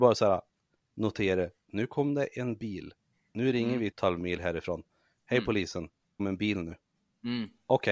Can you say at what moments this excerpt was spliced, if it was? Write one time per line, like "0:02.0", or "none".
0:03.9
0:06.2

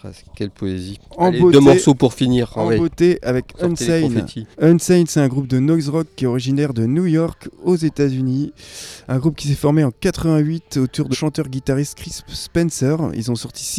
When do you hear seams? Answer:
0:04.5
0:11.1

